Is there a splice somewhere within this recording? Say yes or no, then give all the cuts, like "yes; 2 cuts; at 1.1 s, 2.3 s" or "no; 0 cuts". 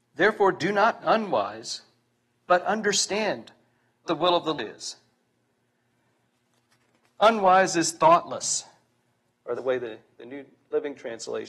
yes; 4 cuts; at 1.0 s, 4.1 s, 4.6 s, 9.6 s